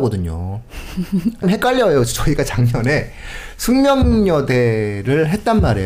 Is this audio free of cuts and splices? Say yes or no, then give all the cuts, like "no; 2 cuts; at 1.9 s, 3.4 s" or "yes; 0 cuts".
no; 1 cut; at 1.4 s